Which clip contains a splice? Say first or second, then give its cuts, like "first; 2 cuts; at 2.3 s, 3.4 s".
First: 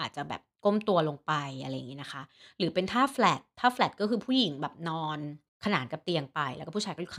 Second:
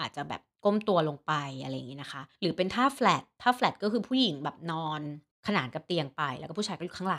second; 1 cut; at 2.3 s